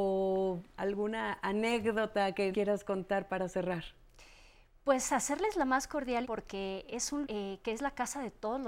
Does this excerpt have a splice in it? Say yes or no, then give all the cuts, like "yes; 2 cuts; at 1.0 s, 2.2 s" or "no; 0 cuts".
yes; 3 cuts; at 2.5 s, 6.2 s, 7.2 s